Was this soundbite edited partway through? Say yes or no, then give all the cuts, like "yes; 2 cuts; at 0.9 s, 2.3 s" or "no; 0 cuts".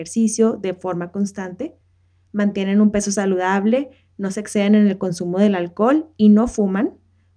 no; 0 cuts